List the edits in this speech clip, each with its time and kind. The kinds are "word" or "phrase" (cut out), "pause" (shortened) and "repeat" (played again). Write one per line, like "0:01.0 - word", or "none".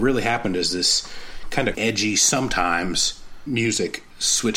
0:01.7 - word
0:03.5 - word